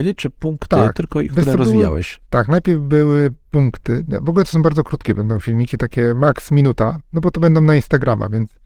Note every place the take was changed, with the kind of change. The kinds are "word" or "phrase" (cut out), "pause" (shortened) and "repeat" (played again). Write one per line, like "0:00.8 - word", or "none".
0:02.2 - pause
0:07.1 - pause